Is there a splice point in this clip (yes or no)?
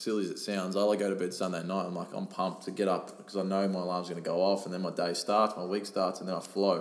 no